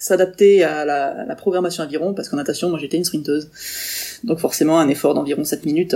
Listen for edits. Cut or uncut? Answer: uncut